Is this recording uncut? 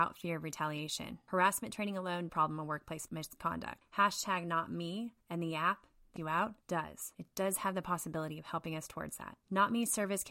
no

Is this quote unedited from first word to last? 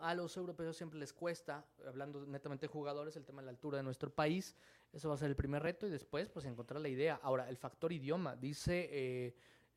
yes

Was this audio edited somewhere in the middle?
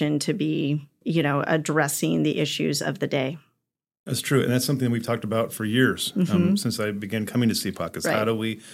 no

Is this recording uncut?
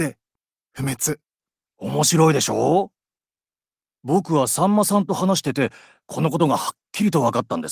yes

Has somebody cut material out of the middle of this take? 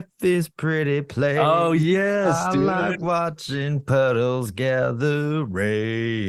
no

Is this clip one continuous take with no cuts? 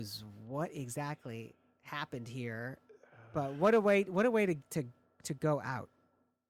yes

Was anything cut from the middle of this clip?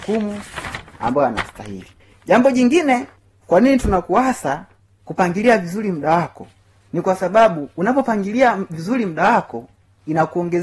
no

